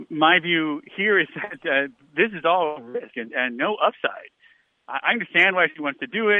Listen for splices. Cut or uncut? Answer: uncut